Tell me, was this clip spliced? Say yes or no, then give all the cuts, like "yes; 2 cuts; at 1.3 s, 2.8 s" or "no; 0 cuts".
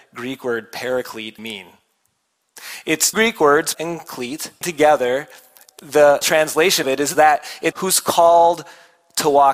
yes; 8 cuts; at 1.4 s, 3.1 s, 3.7 s, 4.6 s, 6.2 s, 6.8 s, 7.1 s, 7.7 s